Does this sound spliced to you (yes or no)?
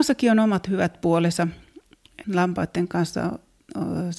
yes